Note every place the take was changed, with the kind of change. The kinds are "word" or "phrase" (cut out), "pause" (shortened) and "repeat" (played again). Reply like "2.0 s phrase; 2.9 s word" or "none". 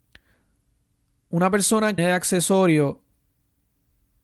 2.0 s phrase